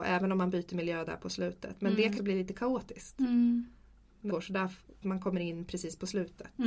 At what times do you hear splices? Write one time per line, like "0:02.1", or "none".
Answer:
0:02.2
0:04.3
0:05.0